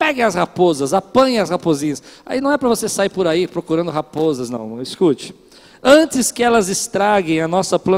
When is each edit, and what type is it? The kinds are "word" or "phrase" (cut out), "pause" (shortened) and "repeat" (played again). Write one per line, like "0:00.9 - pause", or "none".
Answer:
none